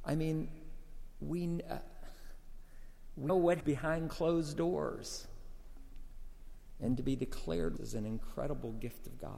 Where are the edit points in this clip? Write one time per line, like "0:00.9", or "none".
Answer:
0:03.3
0:03.6
0:07.8